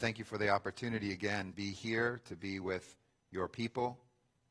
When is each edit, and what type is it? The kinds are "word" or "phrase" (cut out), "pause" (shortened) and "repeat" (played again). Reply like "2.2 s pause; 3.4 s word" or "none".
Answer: 1.5 s word